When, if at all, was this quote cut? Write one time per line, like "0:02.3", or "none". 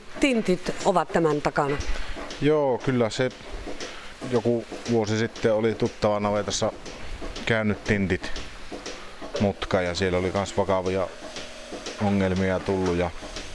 none